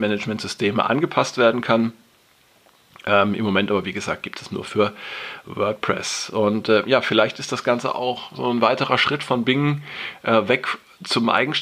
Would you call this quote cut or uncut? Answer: uncut